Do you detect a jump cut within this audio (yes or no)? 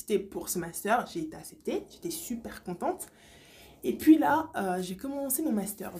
no